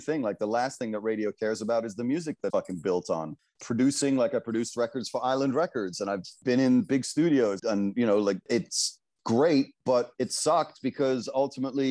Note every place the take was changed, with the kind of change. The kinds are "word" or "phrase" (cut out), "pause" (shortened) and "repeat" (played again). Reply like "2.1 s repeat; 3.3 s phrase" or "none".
2.5 s word; 7.6 s word; 8.4 s pause; 10.1 s pause